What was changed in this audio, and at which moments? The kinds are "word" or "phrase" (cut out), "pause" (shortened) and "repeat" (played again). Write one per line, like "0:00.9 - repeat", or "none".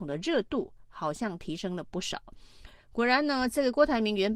0:02.8 - pause